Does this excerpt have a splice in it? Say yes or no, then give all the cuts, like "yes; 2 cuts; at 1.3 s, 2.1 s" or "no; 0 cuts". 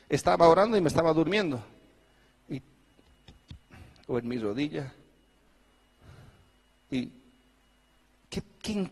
no; 0 cuts